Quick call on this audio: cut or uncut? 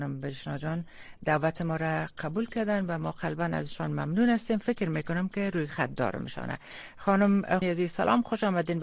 cut